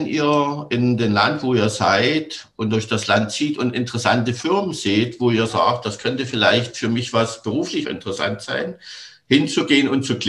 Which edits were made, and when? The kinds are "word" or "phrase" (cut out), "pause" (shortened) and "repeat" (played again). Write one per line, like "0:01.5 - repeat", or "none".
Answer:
0:07.8 - word

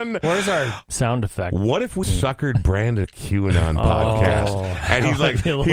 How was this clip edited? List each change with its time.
0:02.0 - word
0:03.0 - word

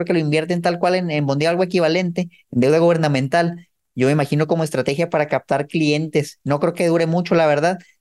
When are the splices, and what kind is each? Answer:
none

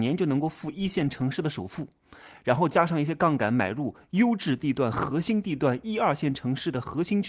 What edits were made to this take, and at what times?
none

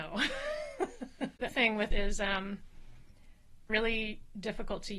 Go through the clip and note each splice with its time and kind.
0:01.5 - word
0:01.9 - word
0:03.7 - phrase

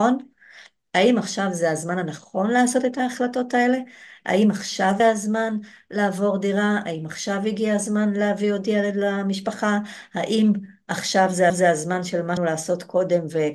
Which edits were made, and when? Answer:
0:05.0 - word
0:11.5 - repeat
0:12.4 - word

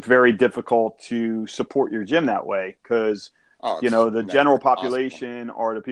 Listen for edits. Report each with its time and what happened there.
none

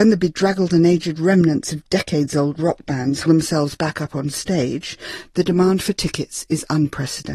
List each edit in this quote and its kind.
0:03.3 - word

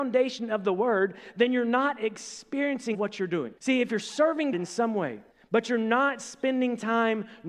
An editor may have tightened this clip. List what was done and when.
0:02.9 - phrase
0:03.6 - pause
0:03.9 - word
0:04.5 - word
0:05.3 - pause

